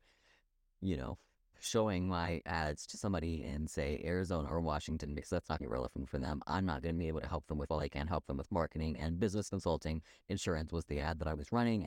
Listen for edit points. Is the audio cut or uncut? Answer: cut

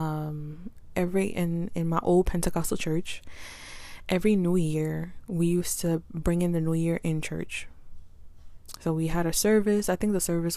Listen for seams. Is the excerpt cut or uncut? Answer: cut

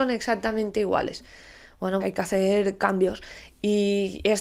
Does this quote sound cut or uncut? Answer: cut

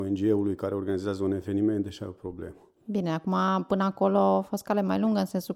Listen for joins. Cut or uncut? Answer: cut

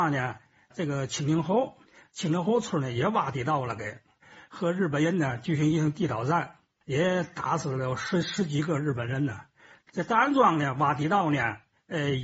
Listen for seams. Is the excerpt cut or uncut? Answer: uncut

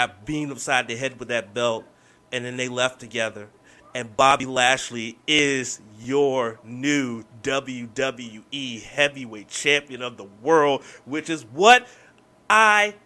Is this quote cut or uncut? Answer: uncut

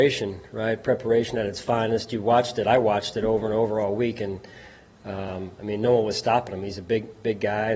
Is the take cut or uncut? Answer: uncut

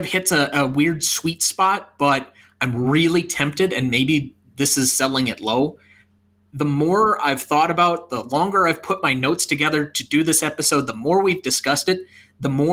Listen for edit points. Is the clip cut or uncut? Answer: uncut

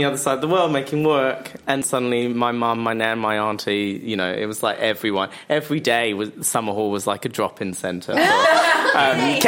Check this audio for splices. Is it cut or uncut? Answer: cut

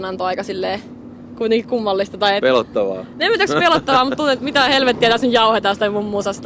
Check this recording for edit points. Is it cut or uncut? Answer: uncut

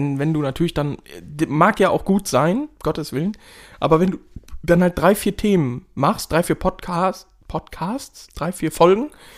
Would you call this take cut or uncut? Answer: uncut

